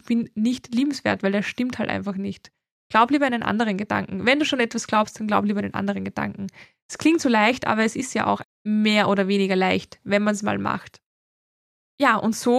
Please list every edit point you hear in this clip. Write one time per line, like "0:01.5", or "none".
0:08.4